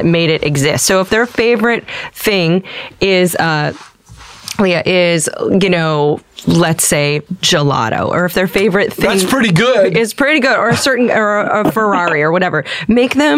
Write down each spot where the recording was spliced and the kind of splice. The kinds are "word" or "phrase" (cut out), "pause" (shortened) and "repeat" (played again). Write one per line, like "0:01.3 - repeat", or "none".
0:07.3 - pause